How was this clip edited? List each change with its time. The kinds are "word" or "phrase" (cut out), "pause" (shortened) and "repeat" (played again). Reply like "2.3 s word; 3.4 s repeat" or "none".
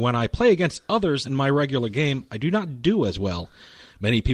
1.2 s word